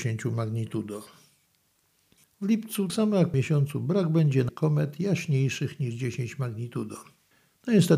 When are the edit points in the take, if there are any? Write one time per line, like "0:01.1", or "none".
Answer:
0:02.9
0:03.3
0:04.5

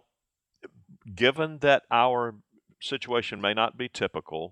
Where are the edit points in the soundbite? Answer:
none

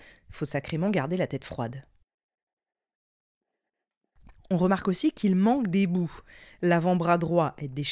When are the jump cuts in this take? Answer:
none

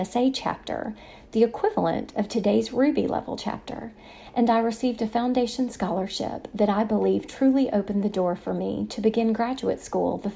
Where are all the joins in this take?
none

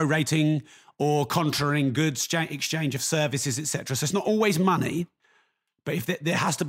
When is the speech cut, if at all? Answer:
none

